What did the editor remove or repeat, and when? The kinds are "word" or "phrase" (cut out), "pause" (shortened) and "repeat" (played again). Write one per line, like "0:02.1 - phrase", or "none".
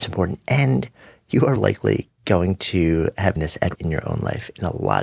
0:01.6 - word
0:03.4 - word
0:03.7 - word

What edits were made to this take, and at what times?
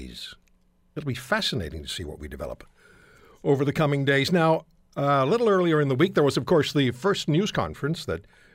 none

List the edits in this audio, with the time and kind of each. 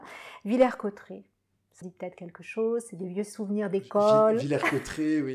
0:01.8 - word

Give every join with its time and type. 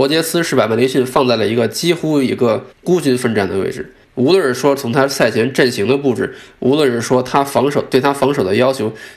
0:02.7 - pause
0:04.0 - pause

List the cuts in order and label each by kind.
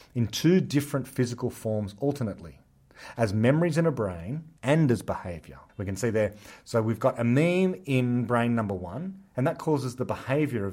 0:04.6 - pause
0:05.7 - pause

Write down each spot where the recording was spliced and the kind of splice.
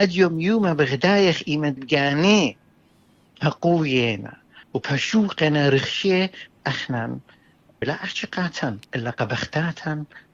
0:01.8 - word
0:04.6 - pause
0:06.6 - word
0:07.8 - word
0:08.9 - pause

